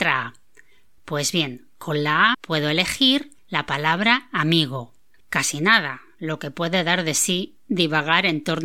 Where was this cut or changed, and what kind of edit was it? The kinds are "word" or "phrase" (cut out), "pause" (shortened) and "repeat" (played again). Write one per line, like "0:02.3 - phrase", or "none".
0:02.3 - word
0:03.4 - pause
0:05.2 - pause